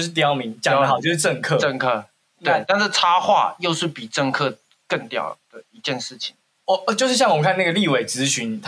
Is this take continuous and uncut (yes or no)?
yes